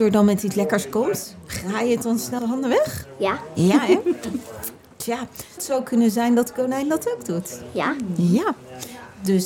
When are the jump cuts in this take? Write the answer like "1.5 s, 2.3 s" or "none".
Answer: 2.4 s, 5.6 s